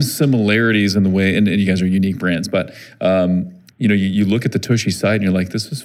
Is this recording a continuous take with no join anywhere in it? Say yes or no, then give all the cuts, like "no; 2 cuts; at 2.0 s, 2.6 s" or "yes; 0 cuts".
yes; 0 cuts